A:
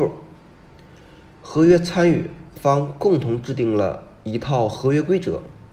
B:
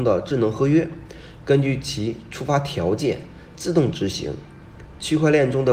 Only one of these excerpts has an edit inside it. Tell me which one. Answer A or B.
A